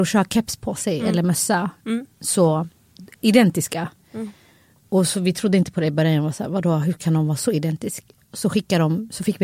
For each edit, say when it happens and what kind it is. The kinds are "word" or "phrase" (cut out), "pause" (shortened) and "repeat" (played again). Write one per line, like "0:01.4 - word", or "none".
none